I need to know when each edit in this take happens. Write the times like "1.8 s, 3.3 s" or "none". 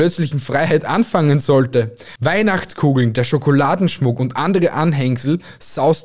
none